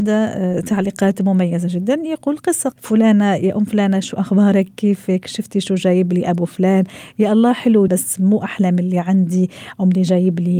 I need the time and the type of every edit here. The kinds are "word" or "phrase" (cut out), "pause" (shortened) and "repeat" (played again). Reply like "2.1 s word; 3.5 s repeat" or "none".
2.7 s word; 7.9 s word